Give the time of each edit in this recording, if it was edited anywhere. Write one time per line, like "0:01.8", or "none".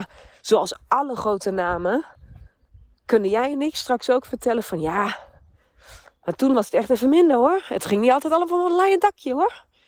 none